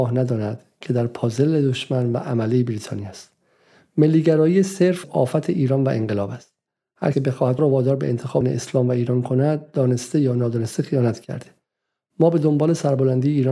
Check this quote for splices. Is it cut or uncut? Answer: cut